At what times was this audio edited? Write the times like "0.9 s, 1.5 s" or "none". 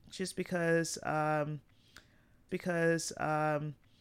2.5 s

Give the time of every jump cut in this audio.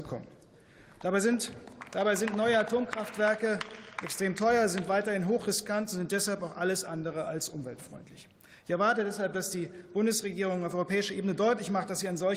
none

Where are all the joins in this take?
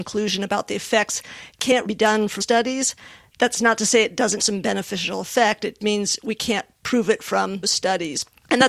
1.9 s, 2.4 s, 4.4 s, 5.8 s, 7.6 s

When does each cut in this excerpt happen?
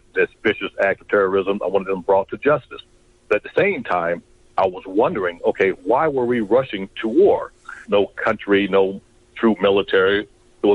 none

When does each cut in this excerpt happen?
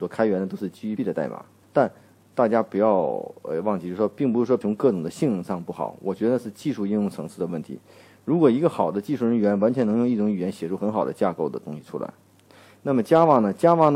1.0 s, 1.6 s, 4.6 s

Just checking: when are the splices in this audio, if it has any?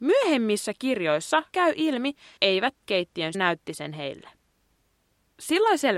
1.5 s, 2.4 s, 2.8 s, 3.3 s

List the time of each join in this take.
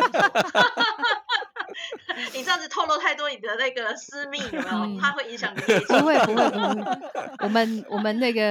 none

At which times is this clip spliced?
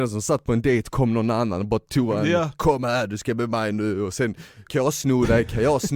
4.7 s

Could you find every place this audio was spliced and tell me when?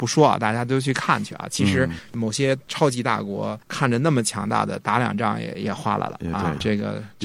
3.6 s

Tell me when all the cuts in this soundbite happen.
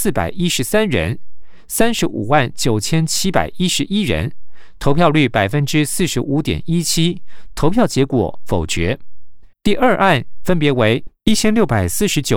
9.5 s

